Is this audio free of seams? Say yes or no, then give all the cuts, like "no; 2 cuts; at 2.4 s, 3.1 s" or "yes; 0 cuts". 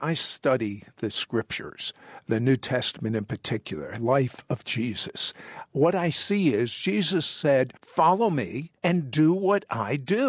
no; 4 cuts; at 4.0 s, 5.7 s, 7.8 s, 8.8 s